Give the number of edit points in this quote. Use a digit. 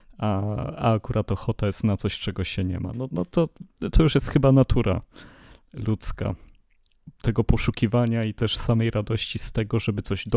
0